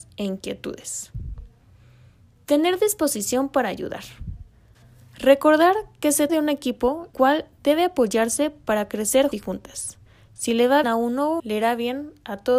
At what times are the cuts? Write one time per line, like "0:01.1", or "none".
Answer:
0:06.3
0:07.1
0:09.3
0:10.8
0:11.4